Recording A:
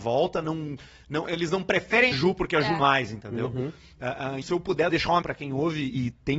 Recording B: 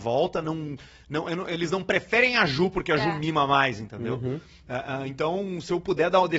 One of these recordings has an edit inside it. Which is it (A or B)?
A